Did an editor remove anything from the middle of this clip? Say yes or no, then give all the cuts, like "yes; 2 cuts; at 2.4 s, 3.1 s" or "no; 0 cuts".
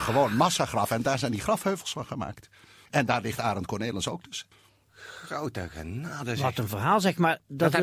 no; 0 cuts